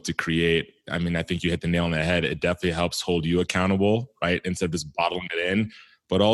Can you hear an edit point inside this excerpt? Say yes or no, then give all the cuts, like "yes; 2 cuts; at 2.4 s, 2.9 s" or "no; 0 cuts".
no; 0 cuts